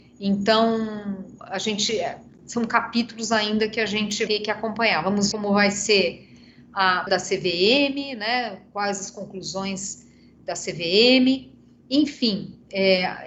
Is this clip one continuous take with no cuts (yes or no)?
no